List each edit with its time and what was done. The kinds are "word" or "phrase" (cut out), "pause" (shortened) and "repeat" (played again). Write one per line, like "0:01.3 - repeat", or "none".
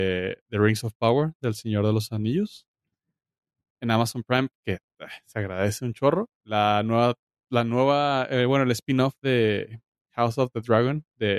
0:06.4 - pause

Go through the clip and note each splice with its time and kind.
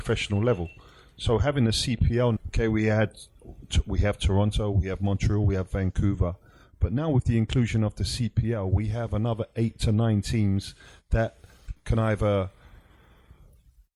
0:02.4 - word
0:11.8 - word

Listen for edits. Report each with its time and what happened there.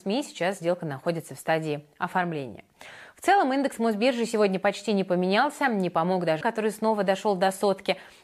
0:06.4 - word

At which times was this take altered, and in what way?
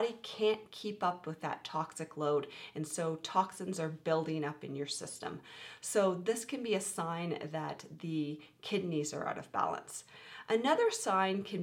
none

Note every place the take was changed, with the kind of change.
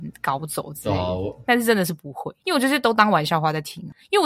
0:02.4 - pause

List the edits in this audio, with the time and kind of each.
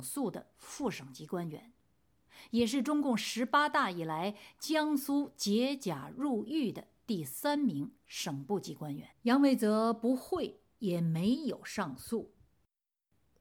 0:09.1 - pause

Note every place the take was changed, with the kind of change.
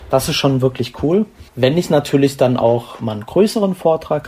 0:01.5 - pause

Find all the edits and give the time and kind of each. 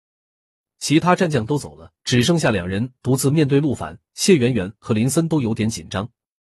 0:02.0 - pause
0:04.1 - pause

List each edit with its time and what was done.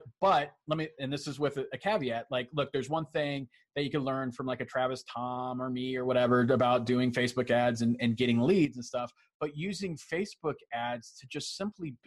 none

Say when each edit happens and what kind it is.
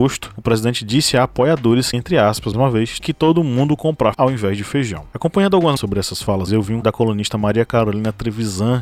0:01.9 - word
0:02.5 - word
0:03.0 - word
0:04.1 - word
0:05.8 - word
0:06.5 - word
0:06.8 - word

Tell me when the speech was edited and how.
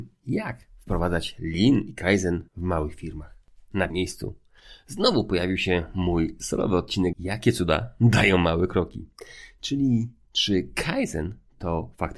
0:02.5 - pause
0:03.9 - word
0:07.1 - phrase

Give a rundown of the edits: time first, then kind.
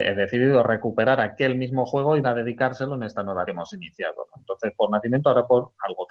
0:02.2 - word
0:03.4 - word

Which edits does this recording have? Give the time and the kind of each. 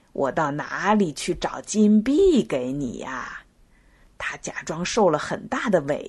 none

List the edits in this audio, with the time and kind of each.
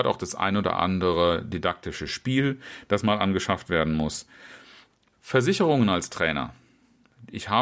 none

